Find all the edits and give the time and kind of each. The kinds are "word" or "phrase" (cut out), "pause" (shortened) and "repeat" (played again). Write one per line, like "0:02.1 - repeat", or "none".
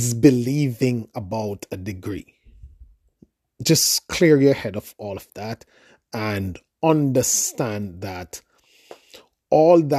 none